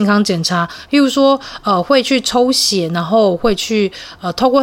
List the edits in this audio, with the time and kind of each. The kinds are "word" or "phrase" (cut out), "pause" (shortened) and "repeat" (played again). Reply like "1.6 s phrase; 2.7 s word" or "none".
none